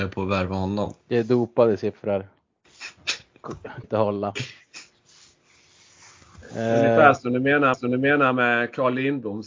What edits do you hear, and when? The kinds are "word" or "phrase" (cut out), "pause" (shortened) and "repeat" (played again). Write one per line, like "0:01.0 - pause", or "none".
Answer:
0:01.0 - pause
0:03.8 - word
0:07.7 - repeat